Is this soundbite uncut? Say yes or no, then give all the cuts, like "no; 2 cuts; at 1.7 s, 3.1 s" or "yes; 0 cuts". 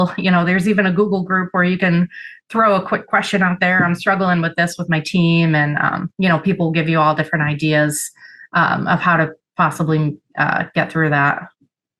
yes; 0 cuts